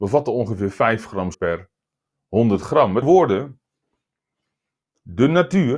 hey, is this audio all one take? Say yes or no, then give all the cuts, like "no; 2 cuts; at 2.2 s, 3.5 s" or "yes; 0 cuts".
no; 2 cuts; at 1.3 s, 3.0 s